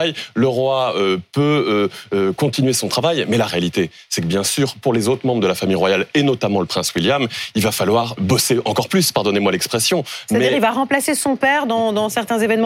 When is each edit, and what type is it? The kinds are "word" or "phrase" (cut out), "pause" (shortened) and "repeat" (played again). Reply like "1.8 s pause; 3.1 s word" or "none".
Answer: 8.2 s word